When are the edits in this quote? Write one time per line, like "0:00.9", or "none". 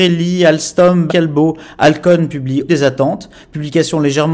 0:01.1
0:02.7